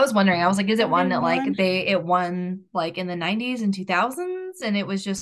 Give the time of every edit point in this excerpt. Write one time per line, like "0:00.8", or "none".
none